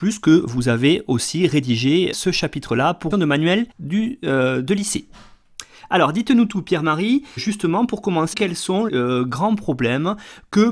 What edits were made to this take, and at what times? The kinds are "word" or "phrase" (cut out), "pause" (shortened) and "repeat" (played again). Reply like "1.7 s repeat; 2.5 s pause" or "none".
2.1 s word; 3.1 s phrase; 3.7 s pause; 7.4 s word; 8.3 s word; 8.9 s word